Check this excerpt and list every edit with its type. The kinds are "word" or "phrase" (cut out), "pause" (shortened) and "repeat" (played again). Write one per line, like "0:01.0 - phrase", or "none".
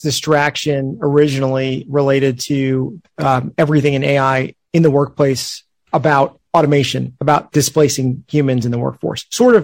none